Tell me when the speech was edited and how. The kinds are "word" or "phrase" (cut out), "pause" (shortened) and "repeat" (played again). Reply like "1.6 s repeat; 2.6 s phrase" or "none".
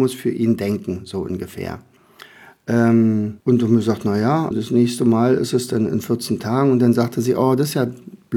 3.4 s pause; 4.5 s word